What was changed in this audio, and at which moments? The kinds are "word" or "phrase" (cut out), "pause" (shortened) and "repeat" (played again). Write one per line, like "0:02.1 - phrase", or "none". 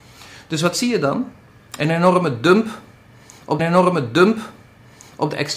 0:03.6 - repeat